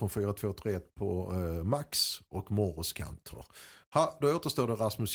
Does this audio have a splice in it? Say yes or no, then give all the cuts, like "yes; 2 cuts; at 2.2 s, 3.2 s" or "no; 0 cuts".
no; 0 cuts